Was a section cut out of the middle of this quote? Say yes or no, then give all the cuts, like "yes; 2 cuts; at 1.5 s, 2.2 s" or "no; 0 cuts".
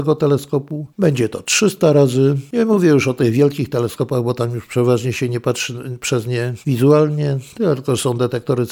no; 0 cuts